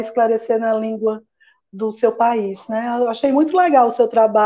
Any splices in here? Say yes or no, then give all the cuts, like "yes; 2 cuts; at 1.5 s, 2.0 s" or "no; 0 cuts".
no; 0 cuts